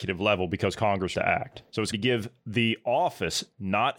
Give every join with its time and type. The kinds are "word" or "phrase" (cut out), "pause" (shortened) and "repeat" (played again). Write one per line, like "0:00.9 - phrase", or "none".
0:01.1 - word
0:01.9 - word